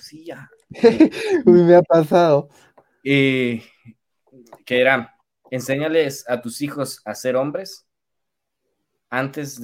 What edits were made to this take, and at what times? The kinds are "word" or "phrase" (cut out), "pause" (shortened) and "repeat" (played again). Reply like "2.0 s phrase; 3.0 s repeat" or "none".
none

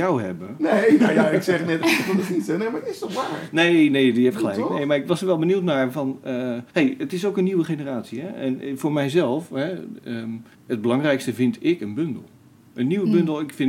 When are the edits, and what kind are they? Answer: 6.7 s pause; 10.5 s pause

